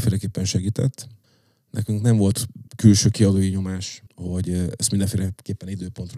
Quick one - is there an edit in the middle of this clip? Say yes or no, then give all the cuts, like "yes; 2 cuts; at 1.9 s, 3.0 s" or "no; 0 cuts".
yes; 3 cuts; at 1.2 s, 2.7 s, 4.1 s